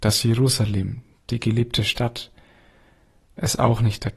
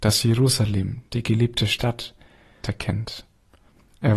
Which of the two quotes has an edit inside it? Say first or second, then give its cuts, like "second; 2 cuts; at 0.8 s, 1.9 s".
second; 2 cuts; at 1.1 s, 2.6 s